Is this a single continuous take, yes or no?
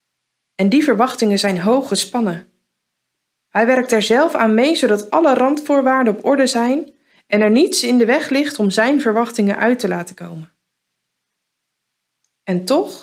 yes